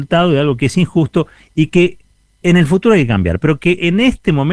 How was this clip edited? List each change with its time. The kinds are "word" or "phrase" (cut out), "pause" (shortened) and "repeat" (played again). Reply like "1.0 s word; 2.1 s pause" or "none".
none